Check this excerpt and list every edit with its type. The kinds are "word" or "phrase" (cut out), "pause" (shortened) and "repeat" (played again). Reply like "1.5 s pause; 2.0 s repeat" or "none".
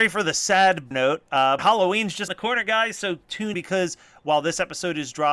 0.9 s word; 1.6 s word; 2.3 s word; 3.5 s word